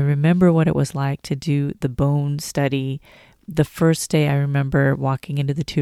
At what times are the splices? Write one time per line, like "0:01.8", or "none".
none